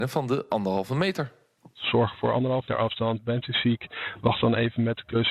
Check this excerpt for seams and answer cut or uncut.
cut